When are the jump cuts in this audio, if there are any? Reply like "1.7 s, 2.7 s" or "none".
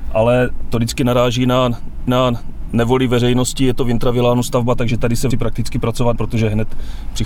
2.1 s, 5.3 s, 6.2 s